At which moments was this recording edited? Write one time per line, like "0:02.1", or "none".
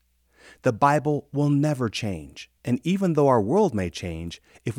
0:02.6